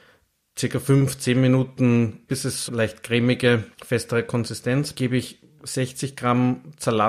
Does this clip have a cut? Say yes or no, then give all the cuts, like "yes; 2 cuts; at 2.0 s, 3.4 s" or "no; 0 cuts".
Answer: yes; 4 cuts; at 2.3 s, 2.7 s, 3.7 s, 4.9 s